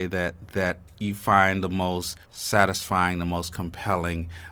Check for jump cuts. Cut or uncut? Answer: cut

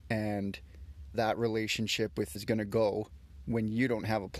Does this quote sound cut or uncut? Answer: cut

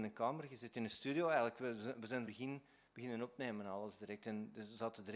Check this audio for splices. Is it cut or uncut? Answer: cut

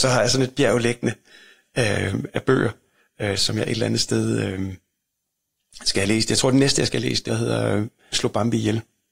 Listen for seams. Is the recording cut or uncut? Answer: cut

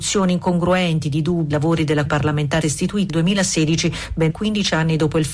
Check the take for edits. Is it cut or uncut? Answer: cut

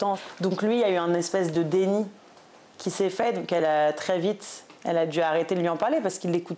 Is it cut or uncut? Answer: uncut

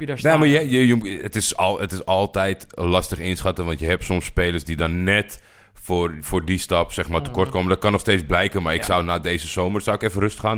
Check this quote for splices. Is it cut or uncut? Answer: uncut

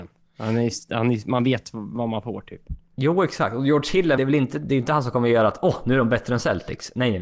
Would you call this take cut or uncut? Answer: cut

